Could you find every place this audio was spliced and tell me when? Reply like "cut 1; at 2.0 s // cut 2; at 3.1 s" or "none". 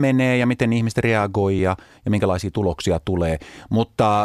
none